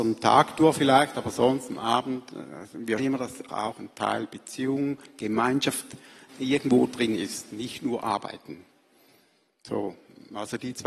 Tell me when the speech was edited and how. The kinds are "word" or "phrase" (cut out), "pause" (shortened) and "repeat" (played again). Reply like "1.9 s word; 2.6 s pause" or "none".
3.0 s word; 3.5 s word; 6.3 s word

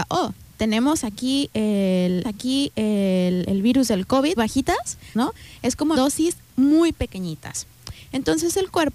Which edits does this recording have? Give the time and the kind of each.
2.2 s repeat; 4.4 s phrase; 5.1 s phrase; 6.0 s phrase

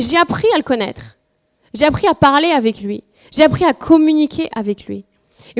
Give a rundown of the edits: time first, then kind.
none

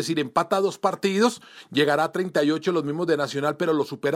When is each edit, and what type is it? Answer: none

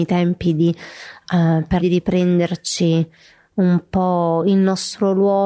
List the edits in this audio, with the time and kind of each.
1.8 s phrase

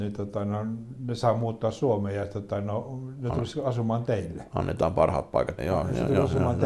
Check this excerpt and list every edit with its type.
5.6 s word

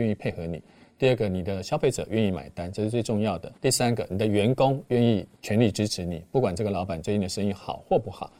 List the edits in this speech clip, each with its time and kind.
3.6 s pause

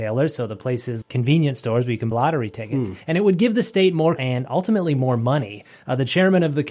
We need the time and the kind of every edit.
1.0 s word; 2.1 s word; 3.0 s pause; 4.2 s word

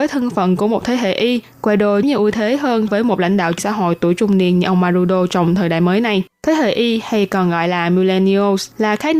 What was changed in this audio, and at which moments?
2.0 s word; 2.9 s word; 3.6 s word; 6.3 s pause

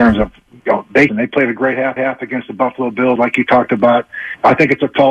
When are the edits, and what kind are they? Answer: 1.1 s phrase; 2.0 s repeat; 3.2 s word

